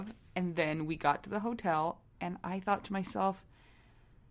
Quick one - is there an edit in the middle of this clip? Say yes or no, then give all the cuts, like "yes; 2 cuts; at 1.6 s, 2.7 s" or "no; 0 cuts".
no; 0 cuts